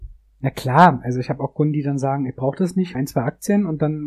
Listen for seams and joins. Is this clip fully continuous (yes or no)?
no